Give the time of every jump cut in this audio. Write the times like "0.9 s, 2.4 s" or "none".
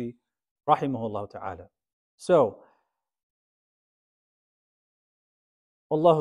1.9 s